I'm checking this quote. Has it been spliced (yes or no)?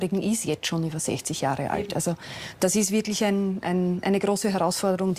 no